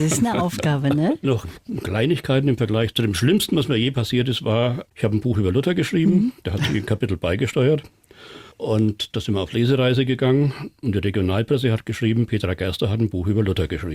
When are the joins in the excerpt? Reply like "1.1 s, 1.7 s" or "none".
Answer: 4.9 s, 8.5 s